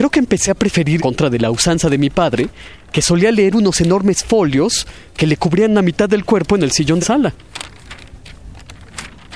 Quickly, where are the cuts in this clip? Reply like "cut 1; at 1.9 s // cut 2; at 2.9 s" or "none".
cut 1; at 1.0 s // cut 2; at 7.0 s